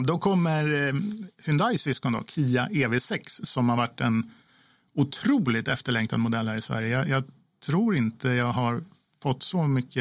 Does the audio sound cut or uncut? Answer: uncut